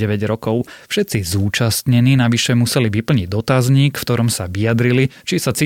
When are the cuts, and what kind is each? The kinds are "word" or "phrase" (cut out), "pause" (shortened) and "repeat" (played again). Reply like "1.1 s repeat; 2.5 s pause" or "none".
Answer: none